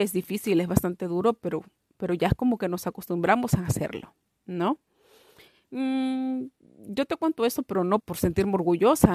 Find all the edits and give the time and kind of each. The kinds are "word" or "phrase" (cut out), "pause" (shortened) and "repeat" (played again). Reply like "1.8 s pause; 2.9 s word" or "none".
8.0 s word